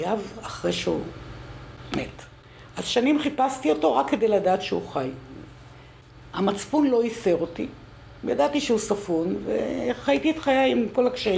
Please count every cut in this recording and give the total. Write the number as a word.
zero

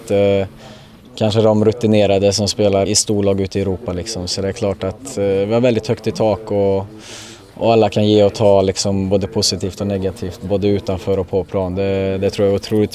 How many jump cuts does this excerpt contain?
one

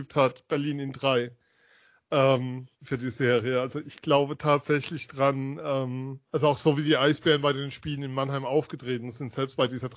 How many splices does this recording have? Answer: two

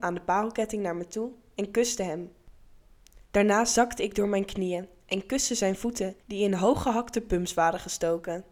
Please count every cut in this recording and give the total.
two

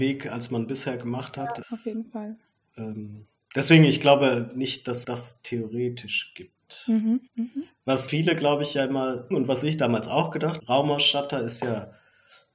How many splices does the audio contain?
six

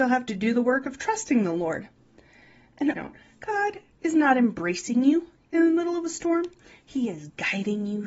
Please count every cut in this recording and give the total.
one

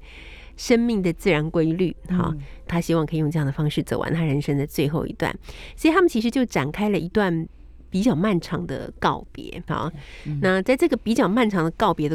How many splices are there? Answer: two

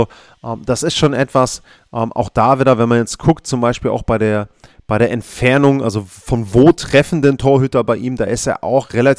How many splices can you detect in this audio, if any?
zero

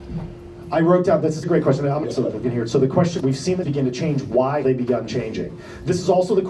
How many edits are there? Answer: six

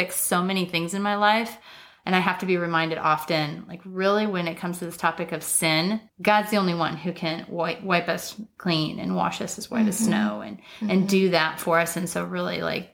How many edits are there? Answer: zero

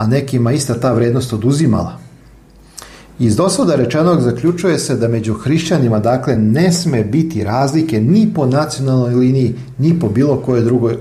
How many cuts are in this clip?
zero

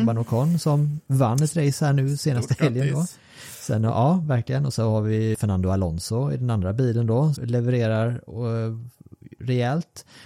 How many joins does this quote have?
two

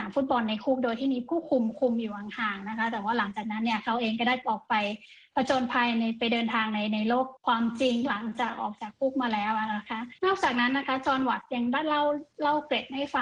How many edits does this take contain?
two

